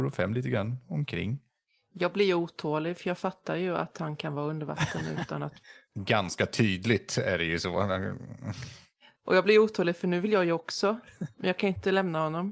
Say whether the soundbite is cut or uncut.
uncut